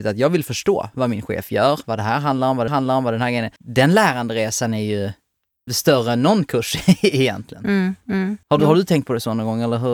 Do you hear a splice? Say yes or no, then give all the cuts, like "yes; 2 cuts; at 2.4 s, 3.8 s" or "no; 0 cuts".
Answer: yes; 4 cuts; at 2.7 s, 3.6 s, 5.7 s, 8.4 s